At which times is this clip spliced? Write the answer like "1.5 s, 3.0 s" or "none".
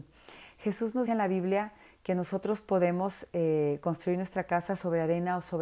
1.1 s